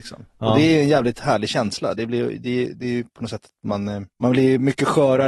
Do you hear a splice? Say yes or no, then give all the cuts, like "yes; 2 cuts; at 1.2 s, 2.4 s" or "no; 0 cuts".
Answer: yes; 1 cut; at 4.1 s